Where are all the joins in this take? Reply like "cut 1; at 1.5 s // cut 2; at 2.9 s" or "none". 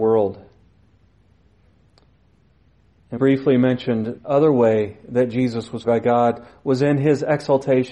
cut 1; at 3.2 s // cut 2; at 4.2 s // cut 3; at 5.8 s